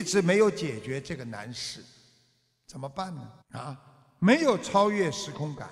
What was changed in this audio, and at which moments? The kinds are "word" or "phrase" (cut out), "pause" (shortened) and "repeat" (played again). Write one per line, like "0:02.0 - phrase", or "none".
0:03.4 - pause